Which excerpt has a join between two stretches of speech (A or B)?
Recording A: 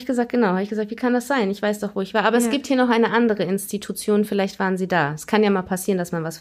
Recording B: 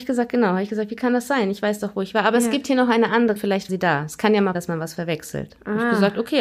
B